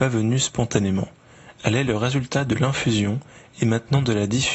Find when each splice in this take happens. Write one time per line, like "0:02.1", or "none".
none